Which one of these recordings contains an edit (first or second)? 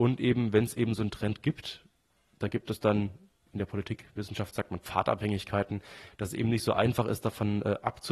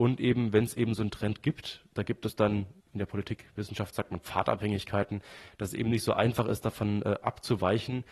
second